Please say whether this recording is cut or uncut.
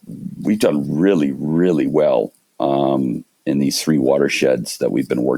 uncut